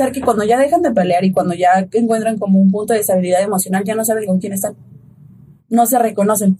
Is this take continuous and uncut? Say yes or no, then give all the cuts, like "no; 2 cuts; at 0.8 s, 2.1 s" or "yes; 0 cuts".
yes; 0 cuts